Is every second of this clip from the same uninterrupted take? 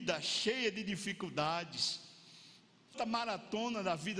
no; 1 cut; at 2.9 s

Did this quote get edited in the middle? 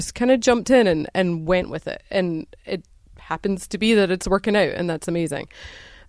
no; 0 cuts

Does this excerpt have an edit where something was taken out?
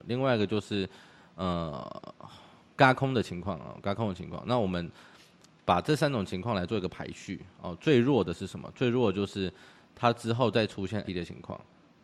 yes; 1 cut; at 11.0 s

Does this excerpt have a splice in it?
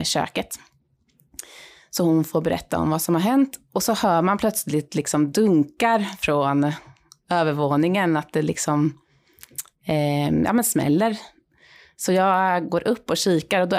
no; 0 cuts

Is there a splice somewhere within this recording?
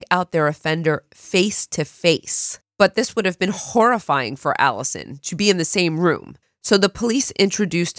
no; 0 cuts

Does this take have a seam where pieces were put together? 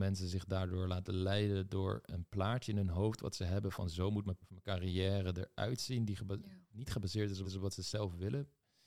yes; 2 cuts; at 4.4 s, 7.4 s

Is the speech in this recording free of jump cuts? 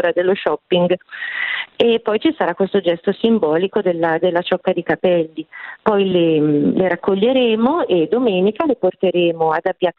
yes; 0 cuts

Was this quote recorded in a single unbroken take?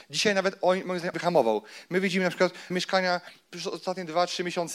no; 2 cuts; at 1.1 s, 2.7 s

